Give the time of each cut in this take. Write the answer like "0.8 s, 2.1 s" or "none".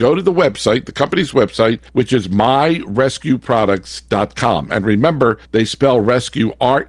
1.9 s, 5.4 s